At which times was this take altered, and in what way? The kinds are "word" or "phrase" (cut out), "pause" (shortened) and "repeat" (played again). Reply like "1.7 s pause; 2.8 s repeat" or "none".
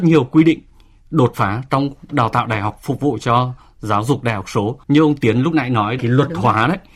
4.8 s pause

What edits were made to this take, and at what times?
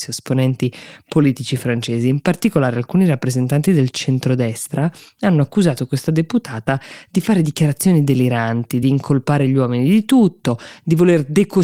none

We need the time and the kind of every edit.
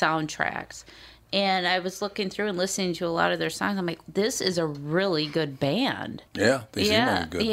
6.3 s pause

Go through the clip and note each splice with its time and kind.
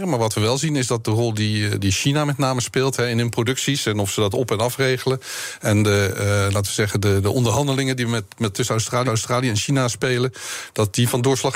8.5 s word; 9.1 s repeat

